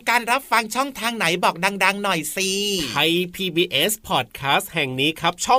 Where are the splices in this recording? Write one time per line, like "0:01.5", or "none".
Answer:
none